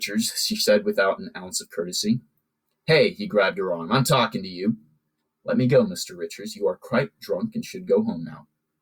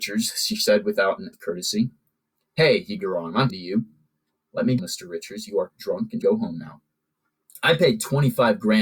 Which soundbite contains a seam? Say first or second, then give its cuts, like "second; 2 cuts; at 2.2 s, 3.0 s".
second; 6 cuts; at 1.3 s, 3.0 s, 3.5 s, 4.8 s, 5.7 s, 6.2 s